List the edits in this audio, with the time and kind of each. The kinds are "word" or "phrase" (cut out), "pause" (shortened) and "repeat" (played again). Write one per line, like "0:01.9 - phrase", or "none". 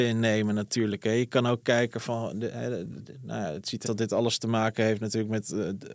0:03.0 - word
0:03.8 - phrase